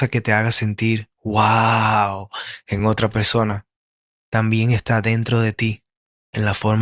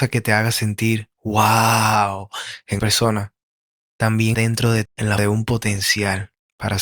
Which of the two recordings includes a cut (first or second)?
second